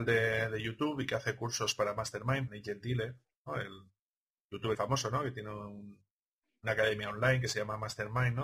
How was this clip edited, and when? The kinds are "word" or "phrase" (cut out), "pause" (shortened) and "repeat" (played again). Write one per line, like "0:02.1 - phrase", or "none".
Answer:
0:02.5 - word
0:04.7 - word